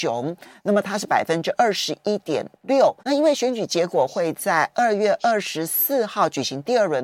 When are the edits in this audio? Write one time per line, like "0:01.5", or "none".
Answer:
0:03.0